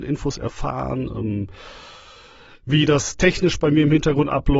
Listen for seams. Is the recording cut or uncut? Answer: uncut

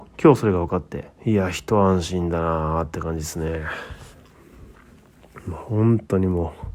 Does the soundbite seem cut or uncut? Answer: cut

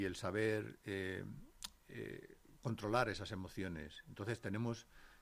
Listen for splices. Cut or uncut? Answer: uncut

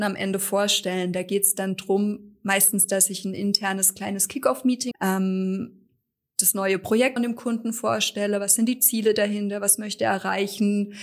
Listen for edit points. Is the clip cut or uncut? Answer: cut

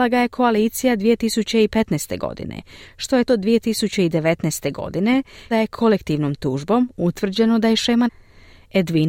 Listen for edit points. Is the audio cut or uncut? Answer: cut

